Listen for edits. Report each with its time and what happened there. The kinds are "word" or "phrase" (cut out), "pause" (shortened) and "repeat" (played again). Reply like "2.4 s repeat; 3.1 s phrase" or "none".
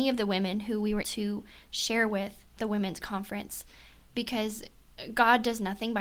1.0 s word; 2.6 s word